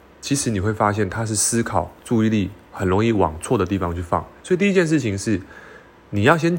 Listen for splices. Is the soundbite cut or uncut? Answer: uncut